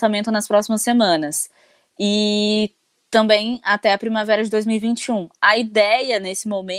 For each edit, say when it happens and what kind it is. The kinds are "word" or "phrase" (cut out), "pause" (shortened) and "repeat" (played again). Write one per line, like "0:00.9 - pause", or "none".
none